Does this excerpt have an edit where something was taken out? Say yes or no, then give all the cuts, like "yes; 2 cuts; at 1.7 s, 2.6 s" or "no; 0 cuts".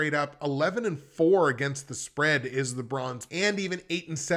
yes; 1 cut; at 3.3 s